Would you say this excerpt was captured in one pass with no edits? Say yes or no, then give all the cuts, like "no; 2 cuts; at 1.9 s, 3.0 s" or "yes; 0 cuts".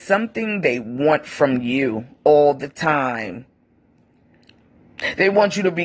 yes; 0 cuts